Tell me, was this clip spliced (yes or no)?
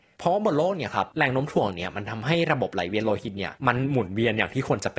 yes